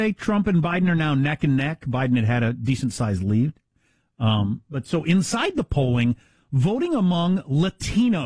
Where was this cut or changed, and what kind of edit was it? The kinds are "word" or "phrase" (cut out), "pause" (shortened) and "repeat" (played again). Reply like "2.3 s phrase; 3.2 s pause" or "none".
none